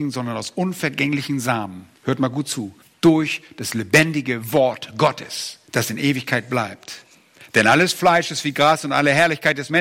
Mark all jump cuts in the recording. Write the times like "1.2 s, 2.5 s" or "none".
2.0 s, 2.8 s, 5.7 s